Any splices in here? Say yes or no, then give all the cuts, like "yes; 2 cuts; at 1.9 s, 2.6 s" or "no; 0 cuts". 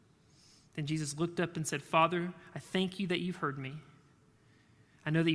no; 0 cuts